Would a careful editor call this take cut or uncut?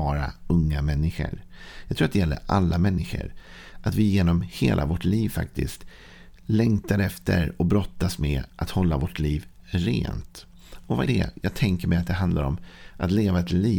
cut